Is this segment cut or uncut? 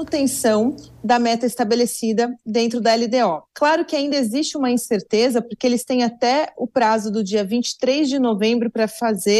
cut